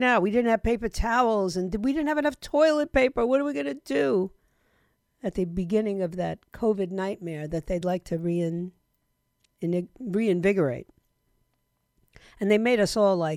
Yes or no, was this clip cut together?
no